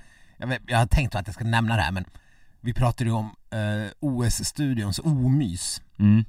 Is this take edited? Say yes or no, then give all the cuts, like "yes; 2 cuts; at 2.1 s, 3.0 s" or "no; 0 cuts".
no; 0 cuts